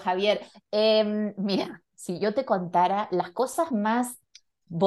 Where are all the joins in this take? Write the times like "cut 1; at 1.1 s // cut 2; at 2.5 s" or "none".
none

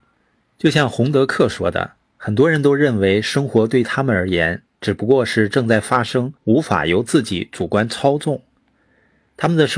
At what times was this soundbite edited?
cut 1; at 6.4 s

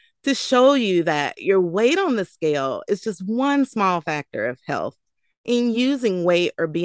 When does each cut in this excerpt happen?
none

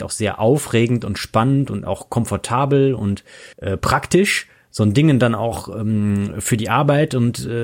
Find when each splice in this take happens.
cut 1; at 3.5 s

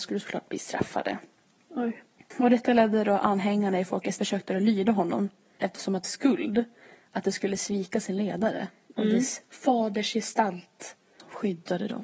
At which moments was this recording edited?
cut 1; at 4.2 s // cut 2; at 5.6 s // cut 3; at 6.0 s

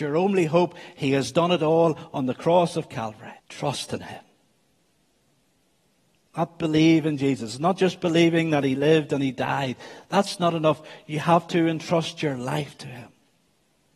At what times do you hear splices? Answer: cut 1; at 3.4 s

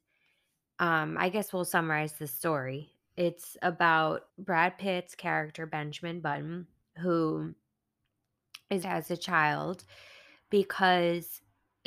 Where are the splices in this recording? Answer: cut 1; at 4.3 s // cut 2; at 6.8 s // cut 3; at 8.8 s

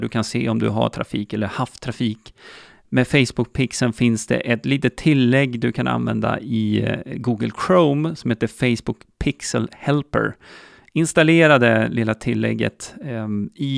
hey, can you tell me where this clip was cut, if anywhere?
none

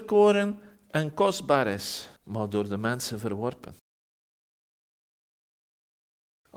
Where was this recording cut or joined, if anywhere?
cut 1; at 2.2 s

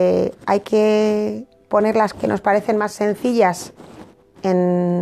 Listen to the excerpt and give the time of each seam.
cut 1; at 2.1 s

